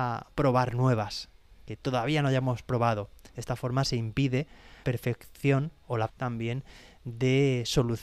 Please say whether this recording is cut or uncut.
cut